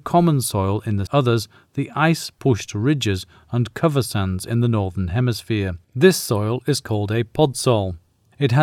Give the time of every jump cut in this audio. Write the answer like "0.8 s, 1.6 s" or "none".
1.1 s, 5.8 s